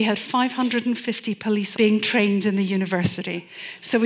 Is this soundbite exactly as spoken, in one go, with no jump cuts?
no; 1 cut; at 1.7 s

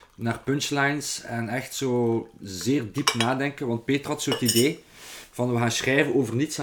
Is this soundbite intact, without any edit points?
yes; 0 cuts

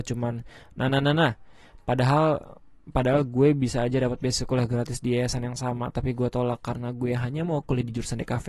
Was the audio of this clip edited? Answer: no; 0 cuts

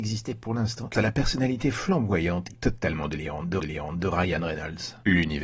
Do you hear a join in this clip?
yes; 3 cuts; at 0.9 s, 2.5 s, 3.6 s

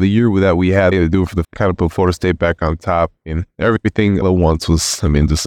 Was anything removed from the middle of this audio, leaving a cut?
yes; 3 cuts; at 0.9 s, 1.4 s, 4.2 s

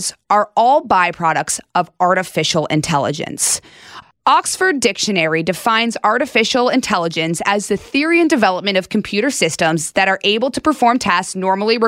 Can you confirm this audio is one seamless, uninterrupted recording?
yes; 0 cuts

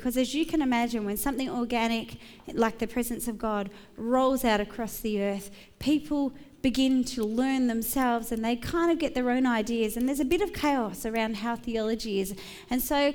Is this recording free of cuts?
yes; 0 cuts

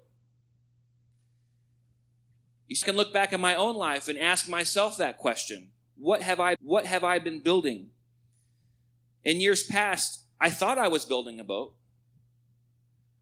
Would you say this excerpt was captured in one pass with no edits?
no; 2 cuts; at 2.8 s, 6.6 s

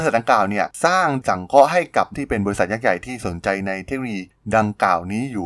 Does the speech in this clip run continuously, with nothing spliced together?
no; 2 cuts; at 1.2 s, 2.1 s

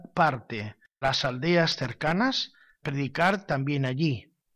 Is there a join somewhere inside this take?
yes; 2 cuts; at 1.0 s, 2.8 s

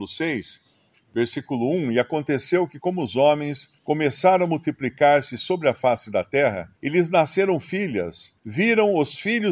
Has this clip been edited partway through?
yes; 3 cuts; at 3.8 s, 6.8 s, 8.4 s

